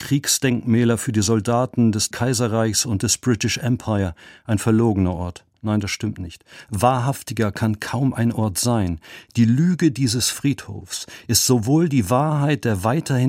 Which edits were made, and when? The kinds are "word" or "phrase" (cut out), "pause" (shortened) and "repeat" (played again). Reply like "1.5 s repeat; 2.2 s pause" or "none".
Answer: 2.1 s word